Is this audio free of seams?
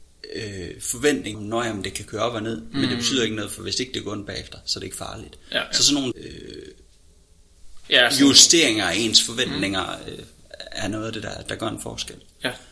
no; 2 cuts; at 1.3 s, 6.1 s

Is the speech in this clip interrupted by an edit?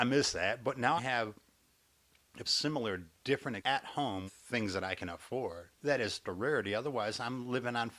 yes; 6 cuts; at 1.0 s, 2.4 s, 3.6 s, 4.3 s, 5.7 s, 6.2 s

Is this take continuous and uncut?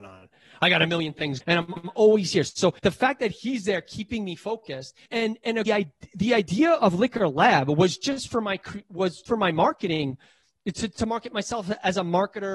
no; 6 cuts; at 1.4 s, 1.8 s, 2.8 s, 5.1 s, 5.7 s, 9.3 s

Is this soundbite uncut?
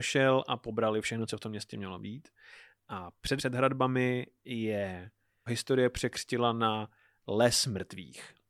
no; 3 cuts; at 1.3 s, 3.4 s, 5.5 s

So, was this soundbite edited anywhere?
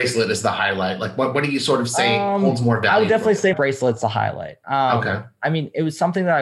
yes; 1 cut; at 3.5 s

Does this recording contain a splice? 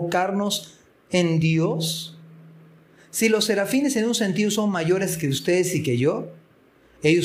no; 0 cuts

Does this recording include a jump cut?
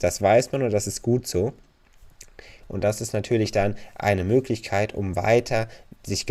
no; 0 cuts

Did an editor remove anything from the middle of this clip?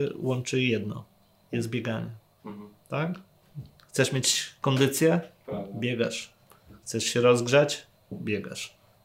no; 0 cuts

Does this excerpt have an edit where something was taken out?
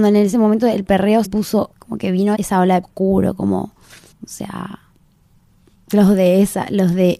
yes; 5 cuts; at 1.2 s, 1.7 s, 2.3 s, 2.8 s, 4.1 s

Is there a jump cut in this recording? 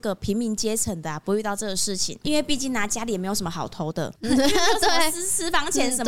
yes; 2 cuts; at 2.2 s, 4.2 s

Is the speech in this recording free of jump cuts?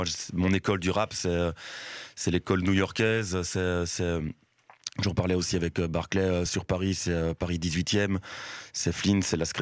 no; 1 cut; at 6.5 s

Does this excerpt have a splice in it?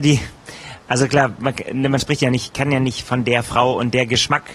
no; 0 cuts

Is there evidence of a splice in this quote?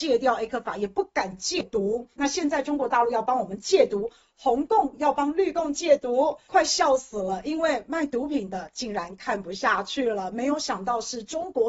no; 0 cuts

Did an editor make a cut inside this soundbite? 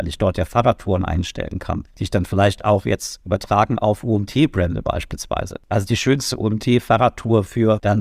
no; 0 cuts

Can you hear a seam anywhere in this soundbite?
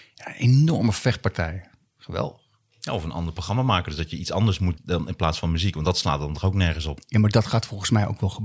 yes; 2 cuts; at 1.8 s, 4.7 s

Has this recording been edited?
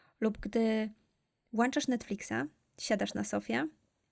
no; 0 cuts

